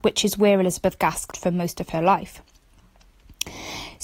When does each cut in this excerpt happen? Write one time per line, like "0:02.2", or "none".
0:01.3